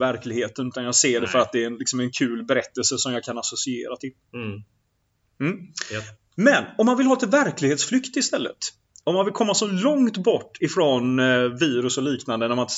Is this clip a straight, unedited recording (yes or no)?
yes